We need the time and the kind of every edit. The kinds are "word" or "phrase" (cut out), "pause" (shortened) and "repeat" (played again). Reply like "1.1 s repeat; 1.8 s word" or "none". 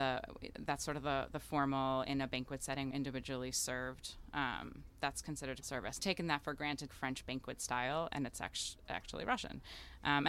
2.9 s phrase; 5.6 s phrase; 6.0 s phrase; 6.9 s phrase